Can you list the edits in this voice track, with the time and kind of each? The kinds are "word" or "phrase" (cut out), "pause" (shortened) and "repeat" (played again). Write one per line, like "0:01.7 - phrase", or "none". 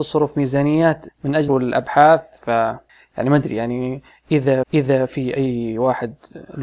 0:01.1 - word
0:01.5 - word
0:02.9 - pause
0:04.6 - repeat